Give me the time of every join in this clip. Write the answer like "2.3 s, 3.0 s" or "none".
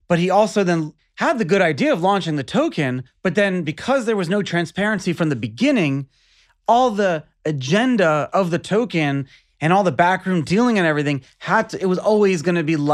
none